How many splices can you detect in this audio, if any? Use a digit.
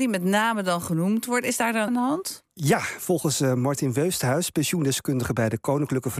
1